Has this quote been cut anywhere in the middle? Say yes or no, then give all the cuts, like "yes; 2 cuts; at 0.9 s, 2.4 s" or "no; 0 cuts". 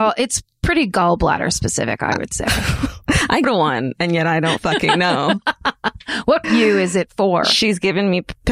yes; 2 cuts; at 3.4 s, 6.4 s